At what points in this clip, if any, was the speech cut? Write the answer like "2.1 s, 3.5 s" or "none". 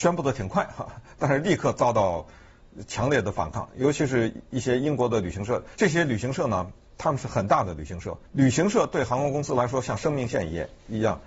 5.7 s, 8.3 s